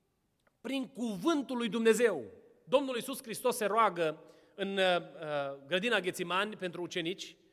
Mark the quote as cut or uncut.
uncut